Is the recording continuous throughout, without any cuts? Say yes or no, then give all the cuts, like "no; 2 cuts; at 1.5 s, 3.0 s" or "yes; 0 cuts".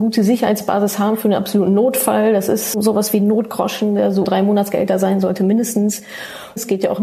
no; 1 cut; at 4.2 s